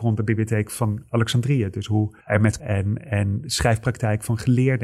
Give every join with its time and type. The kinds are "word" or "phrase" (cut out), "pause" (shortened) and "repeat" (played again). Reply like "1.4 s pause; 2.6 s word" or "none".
2.2 s pause; 2.6 s word